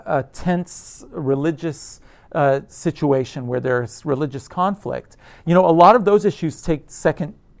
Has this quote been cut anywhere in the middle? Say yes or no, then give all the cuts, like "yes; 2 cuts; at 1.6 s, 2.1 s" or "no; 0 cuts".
no; 0 cuts